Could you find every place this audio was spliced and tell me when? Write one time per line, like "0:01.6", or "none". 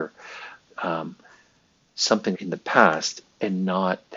0:02.3